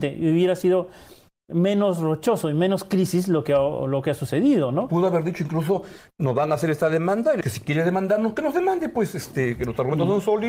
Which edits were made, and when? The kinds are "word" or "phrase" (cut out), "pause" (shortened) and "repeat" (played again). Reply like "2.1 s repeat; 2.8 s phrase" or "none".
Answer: 7.4 s word

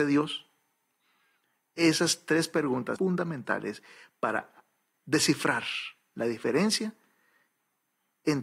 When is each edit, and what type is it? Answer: 3.0 s word; 4.9 s word

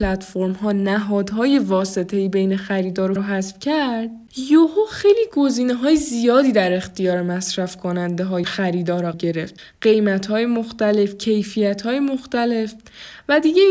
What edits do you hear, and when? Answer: 3.2 s word; 8.4 s word; 9.1 s word

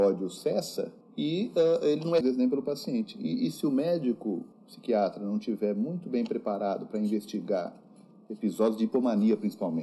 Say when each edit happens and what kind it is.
1.0 s pause; 2.2 s phrase; 4.5 s pause

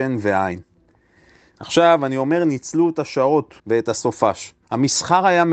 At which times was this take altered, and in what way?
3.6 s pause; 4.6 s pause

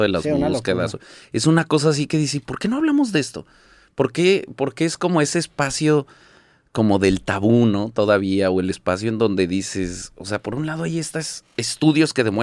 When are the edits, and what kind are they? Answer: none

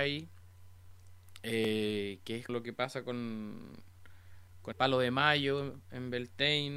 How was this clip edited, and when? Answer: 2.5 s word; 4.7 s word

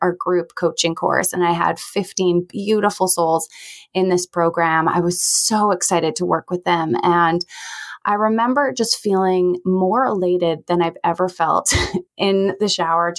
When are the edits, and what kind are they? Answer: 12.1 s pause

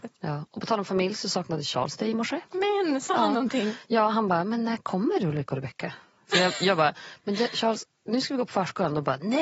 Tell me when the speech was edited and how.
2.5 s pause

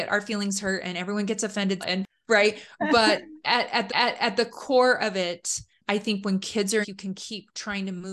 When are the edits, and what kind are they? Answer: 1.8 s word; 3.9 s repeat; 6.8 s phrase

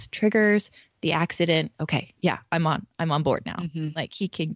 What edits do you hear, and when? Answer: 0.9 s word

